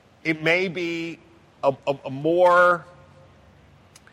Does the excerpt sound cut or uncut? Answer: uncut